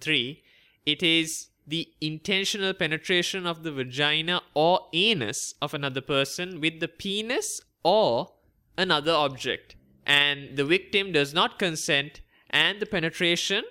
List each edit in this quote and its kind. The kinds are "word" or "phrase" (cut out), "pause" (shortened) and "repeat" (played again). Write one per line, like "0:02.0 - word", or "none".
none